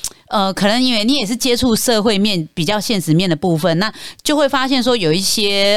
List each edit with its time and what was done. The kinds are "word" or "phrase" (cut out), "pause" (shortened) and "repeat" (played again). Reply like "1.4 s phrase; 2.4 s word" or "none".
none